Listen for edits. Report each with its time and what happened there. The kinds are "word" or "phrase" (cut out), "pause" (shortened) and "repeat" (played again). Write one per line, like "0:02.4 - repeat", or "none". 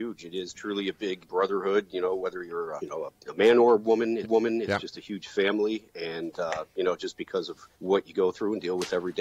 0:01.2 - word
0:02.8 - word
0:04.2 - repeat
0:07.7 - pause